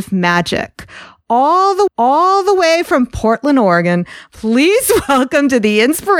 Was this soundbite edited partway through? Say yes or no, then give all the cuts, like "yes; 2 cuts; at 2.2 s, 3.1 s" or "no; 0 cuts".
yes; 1 cut; at 1.9 s